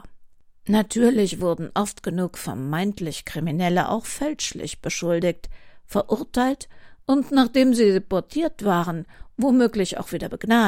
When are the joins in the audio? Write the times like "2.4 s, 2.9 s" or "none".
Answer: none

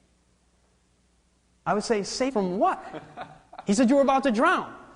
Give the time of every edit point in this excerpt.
2.3 s

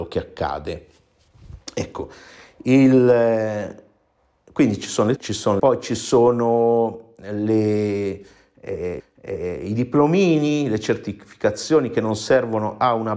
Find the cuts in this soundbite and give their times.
1.6 s, 5.2 s, 5.6 s, 9.0 s

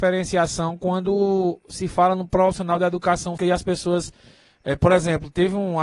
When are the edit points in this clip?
3.4 s

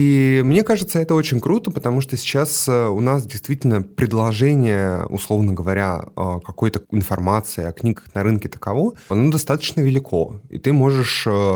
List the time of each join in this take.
9.1 s

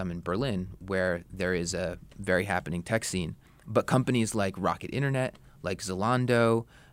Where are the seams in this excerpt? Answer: 3.5 s

